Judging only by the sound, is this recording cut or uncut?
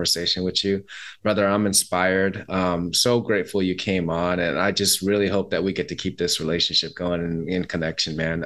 uncut